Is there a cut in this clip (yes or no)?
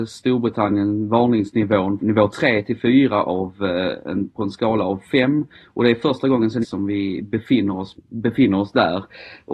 yes